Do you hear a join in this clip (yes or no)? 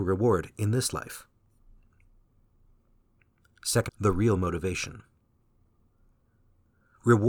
yes